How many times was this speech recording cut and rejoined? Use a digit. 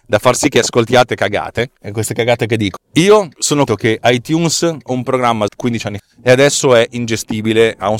7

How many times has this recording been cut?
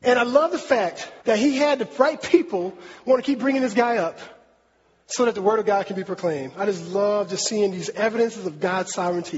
1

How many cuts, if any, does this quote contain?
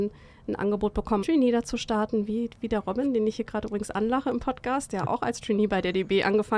1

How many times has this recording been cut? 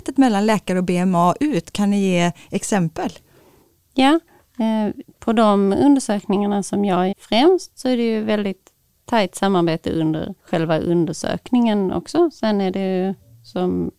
3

